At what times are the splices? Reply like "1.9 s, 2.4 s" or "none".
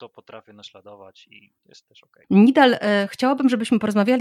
1.6 s